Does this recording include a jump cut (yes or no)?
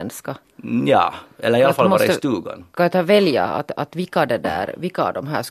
no